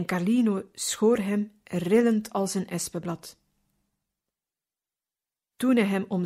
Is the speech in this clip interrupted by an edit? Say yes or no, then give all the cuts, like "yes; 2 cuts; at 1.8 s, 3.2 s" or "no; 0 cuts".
no; 0 cuts